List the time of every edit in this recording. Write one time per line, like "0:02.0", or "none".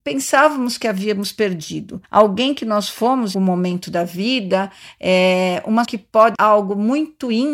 0:02.0
0:03.3
0:05.8
0:06.3